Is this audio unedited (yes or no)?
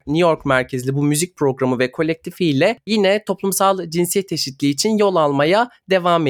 yes